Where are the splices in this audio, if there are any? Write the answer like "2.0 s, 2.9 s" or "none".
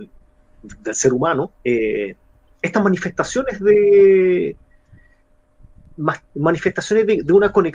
1.6 s